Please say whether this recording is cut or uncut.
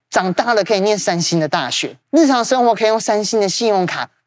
cut